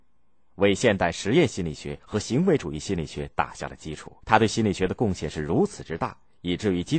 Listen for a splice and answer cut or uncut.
cut